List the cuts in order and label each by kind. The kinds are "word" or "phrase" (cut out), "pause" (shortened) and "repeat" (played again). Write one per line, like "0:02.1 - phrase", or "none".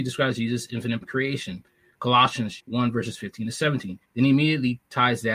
0:01.0 - word
0:02.6 - word
0:04.0 - pause